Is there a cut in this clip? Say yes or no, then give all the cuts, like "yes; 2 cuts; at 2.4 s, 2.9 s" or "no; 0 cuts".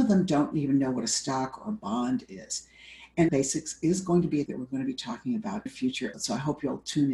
yes; 4 cuts; at 3.3 s, 4.5 s, 5.7 s, 6.1 s